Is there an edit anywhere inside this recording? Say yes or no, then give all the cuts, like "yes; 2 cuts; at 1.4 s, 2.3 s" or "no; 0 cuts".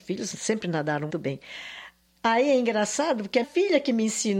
yes; 2 cuts; at 1.1 s, 3.4 s